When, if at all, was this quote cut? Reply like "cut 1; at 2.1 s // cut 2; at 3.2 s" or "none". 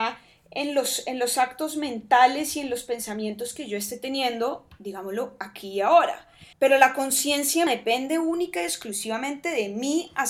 cut 1; at 6.5 s // cut 2; at 7.7 s